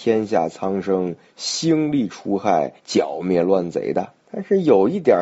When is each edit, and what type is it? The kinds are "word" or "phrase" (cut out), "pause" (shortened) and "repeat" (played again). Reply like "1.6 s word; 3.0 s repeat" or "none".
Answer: 2.8 s pause; 4.2 s pause

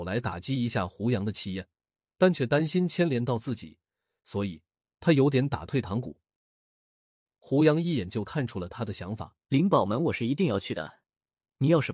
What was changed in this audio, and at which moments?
9.4 s pause

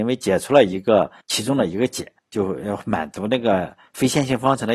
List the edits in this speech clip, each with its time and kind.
1.2 s pause; 2.2 s pause

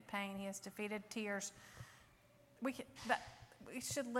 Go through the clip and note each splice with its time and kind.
none

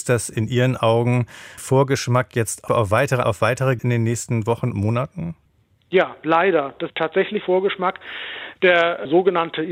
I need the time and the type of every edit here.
1.6 s word; 3.2 s word; 3.8 s word; 4.7 s word; 6.9 s word; 7.4 s word

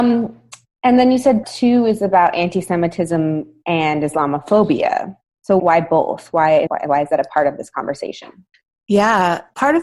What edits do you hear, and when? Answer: 1.4 s word; 5.6 s word; 6.7 s word

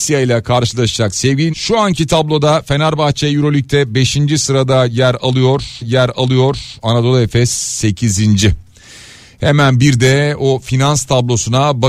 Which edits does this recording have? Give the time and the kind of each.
1.5 s word; 5.8 s repeat

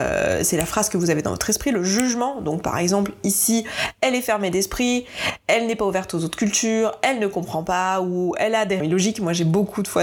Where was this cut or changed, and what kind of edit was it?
8.8 s word

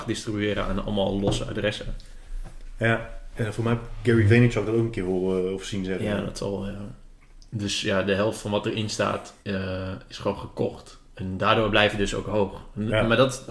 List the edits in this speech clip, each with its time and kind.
9.4 s pause

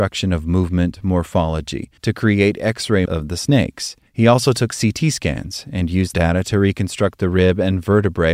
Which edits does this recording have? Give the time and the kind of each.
2.0 s pause; 3.1 s word; 4.1 s pause; 6.1 s word

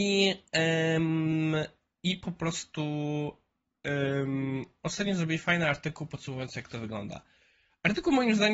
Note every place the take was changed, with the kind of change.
none

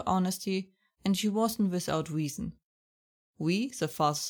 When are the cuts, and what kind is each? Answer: none

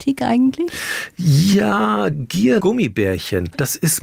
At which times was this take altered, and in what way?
2.1 s word; 2.6 s word

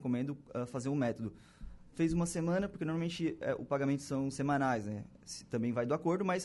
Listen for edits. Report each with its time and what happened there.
none

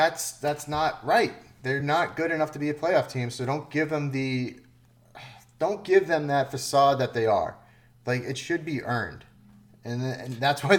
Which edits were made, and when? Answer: none

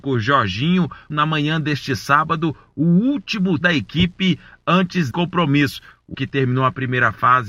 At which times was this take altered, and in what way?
1.1 s word; 3.6 s word; 5.1 s word; 6.1 s word

